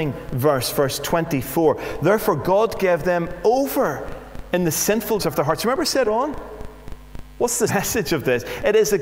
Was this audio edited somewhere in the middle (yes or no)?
yes